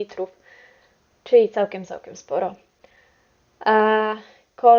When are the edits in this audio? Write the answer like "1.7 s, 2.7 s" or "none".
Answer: none